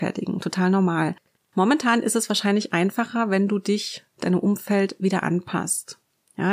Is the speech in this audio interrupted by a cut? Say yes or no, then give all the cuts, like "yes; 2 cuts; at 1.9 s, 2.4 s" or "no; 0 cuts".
no; 0 cuts